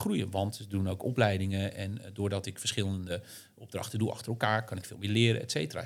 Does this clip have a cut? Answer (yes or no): no